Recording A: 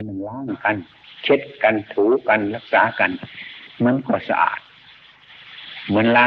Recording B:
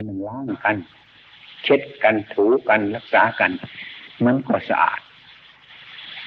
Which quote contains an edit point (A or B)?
A